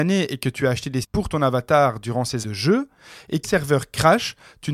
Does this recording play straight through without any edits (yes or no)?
no